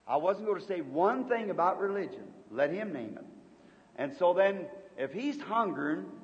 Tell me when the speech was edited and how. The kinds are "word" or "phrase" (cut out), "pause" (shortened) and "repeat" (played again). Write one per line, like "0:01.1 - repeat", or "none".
0:02.4 - pause